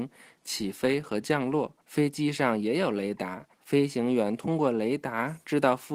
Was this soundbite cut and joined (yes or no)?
yes